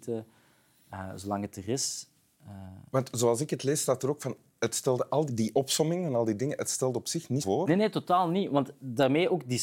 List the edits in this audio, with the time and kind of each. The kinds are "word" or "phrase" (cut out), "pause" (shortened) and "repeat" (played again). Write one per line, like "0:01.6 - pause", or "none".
0:05.3 - word
0:07.4 - word